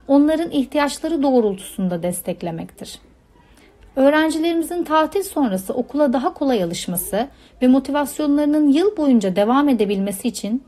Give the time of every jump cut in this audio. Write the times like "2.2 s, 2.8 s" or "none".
none